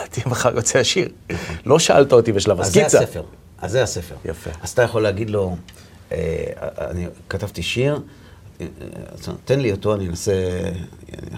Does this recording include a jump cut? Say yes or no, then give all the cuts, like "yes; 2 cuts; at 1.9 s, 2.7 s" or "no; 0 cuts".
no; 0 cuts